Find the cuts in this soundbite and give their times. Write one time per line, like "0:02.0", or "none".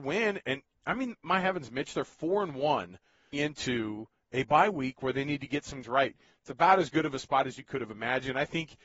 0:03.3
0:05.8